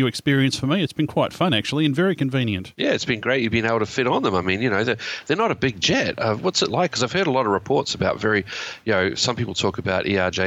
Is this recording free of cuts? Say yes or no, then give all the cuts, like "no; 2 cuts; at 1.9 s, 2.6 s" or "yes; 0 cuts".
yes; 0 cuts